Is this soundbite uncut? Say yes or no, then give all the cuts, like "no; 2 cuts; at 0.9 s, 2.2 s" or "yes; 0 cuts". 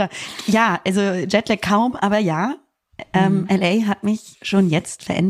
yes; 0 cuts